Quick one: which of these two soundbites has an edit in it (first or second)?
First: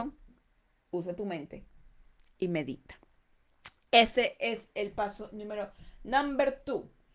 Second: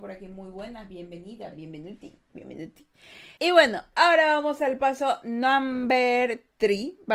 second